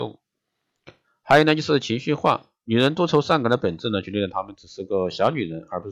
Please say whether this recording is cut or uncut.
uncut